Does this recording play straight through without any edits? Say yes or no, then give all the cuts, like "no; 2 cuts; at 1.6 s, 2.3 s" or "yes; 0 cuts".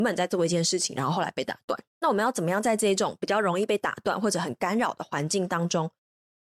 no; 1 cut; at 1.9 s